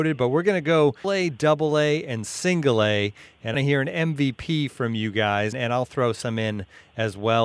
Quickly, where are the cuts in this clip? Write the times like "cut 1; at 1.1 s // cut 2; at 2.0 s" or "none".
cut 1; at 1.0 s // cut 2; at 3.5 s // cut 3; at 5.5 s